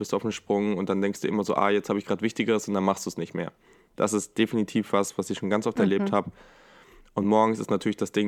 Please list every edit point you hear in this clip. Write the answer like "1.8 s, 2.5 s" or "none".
none